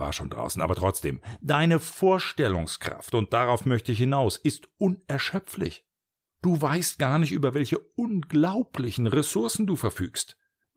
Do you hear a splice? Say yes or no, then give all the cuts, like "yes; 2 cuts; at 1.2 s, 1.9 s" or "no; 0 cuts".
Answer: no; 0 cuts